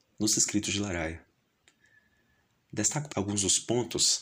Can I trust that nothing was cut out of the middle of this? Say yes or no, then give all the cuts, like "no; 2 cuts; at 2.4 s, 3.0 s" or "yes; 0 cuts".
no; 1 cut; at 3.1 s